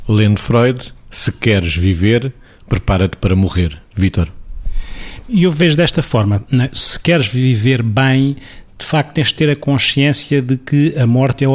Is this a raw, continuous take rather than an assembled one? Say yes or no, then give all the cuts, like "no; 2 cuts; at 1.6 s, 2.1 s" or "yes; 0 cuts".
yes; 0 cuts